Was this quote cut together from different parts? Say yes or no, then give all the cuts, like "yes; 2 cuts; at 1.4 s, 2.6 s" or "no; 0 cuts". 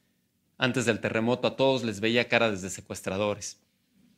no; 0 cuts